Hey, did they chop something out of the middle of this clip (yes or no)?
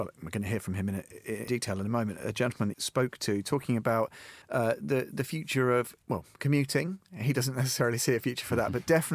yes